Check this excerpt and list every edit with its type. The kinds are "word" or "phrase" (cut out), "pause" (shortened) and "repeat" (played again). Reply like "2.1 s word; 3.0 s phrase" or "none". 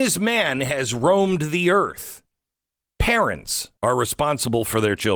3.8 s pause